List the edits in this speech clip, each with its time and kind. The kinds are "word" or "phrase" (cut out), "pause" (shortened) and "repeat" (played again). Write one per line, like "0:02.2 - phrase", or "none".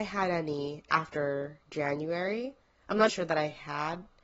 0:03.1 - word